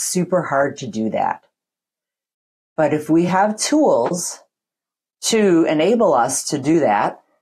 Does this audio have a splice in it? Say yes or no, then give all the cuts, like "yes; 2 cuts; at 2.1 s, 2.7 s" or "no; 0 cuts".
no; 0 cuts